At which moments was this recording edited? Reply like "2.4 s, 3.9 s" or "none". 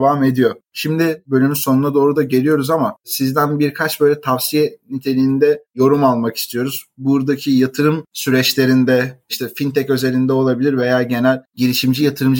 none